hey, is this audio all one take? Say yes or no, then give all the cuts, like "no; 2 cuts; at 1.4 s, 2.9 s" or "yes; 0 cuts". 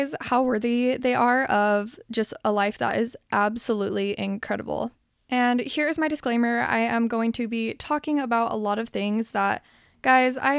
yes; 0 cuts